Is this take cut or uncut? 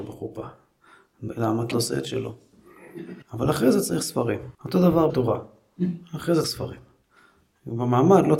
cut